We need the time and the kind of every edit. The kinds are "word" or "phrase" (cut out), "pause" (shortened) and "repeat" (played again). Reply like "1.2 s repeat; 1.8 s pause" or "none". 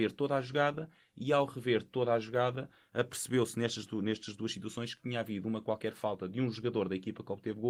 none